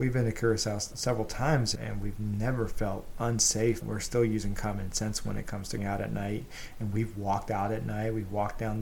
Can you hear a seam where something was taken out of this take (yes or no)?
yes